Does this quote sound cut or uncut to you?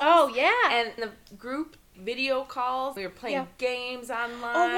cut